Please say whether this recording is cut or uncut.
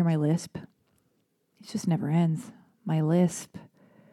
uncut